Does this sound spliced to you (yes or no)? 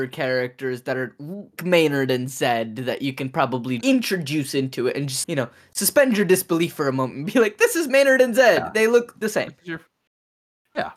yes